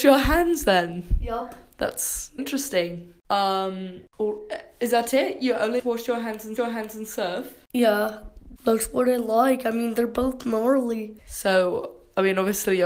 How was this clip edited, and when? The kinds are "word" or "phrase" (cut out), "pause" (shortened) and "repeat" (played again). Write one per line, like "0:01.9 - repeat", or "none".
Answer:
0:02.4 - word
0:05.8 - word
0:06.6 - repeat
0:08.6 - word
0:11.2 - pause